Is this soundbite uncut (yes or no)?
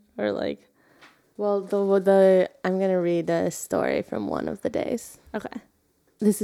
no